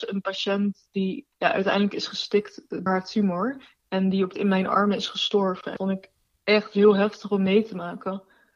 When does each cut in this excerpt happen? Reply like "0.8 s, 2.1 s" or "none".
1.3 s, 2.9 s, 4.3 s, 5.8 s